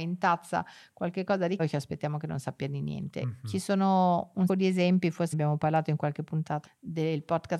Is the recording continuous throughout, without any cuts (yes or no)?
no